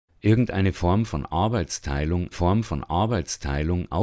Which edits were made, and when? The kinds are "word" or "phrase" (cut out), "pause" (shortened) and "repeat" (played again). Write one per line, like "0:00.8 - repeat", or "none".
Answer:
0:02.3 - repeat